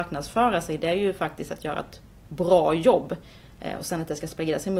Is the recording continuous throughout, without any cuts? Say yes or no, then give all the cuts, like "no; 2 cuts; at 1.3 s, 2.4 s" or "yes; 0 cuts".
yes; 0 cuts